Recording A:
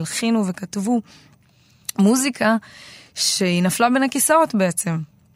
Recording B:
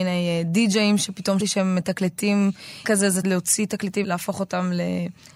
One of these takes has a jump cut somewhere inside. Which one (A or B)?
B